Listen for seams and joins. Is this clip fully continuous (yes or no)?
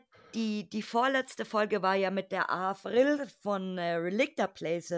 yes